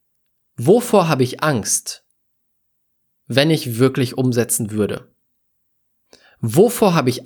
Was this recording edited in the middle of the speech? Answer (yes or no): no